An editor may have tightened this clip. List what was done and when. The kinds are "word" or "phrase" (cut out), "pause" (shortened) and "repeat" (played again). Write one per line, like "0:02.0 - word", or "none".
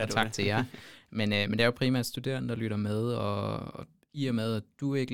none